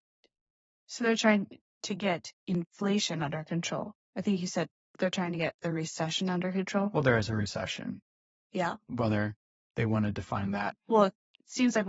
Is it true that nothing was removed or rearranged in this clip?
yes; 0 cuts

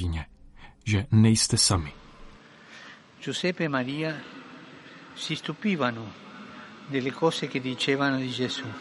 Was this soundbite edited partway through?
no; 0 cuts

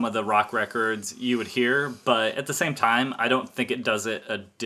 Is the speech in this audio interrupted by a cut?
no; 0 cuts

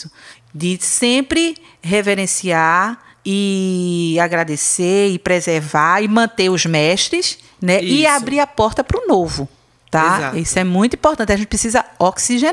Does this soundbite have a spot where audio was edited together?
no; 0 cuts

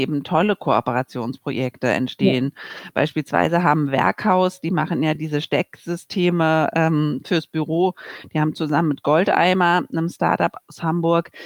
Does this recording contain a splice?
no; 0 cuts

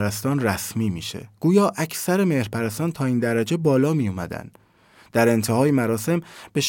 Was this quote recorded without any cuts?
yes; 0 cuts

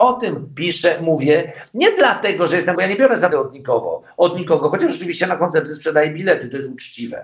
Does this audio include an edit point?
yes; 2 cuts; at 2.7 s, 3.3 s

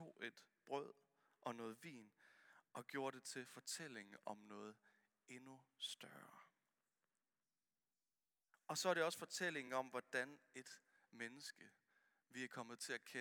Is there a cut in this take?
no; 0 cuts

